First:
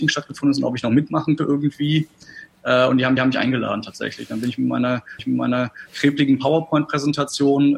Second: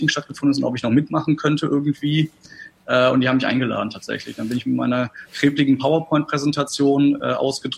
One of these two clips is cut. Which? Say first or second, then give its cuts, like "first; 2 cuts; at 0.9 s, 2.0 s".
first; 3 cuts; at 1.4 s, 3.2 s, 5.2 s